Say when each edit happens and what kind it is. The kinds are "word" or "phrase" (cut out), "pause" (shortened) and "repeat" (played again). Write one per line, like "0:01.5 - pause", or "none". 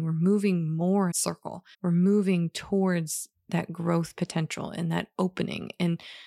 0:01.1 - phrase
0:01.7 - pause